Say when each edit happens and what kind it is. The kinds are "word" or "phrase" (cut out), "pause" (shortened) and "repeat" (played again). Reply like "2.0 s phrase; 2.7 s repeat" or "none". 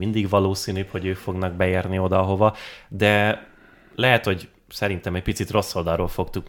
none